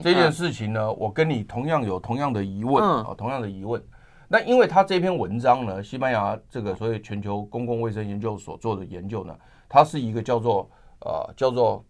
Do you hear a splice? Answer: no; 0 cuts

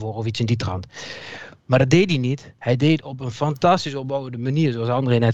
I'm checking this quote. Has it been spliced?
no; 0 cuts

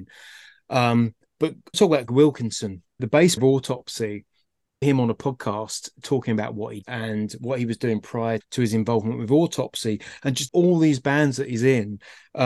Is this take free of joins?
no; 9 cuts; at 1.7 s, 2.1 s, 3.0 s, 3.4 s, 4.8 s, 6.0 s, 6.8 s, 8.4 s, 10.5 s

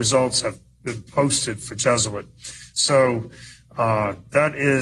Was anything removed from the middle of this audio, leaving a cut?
no; 0 cuts

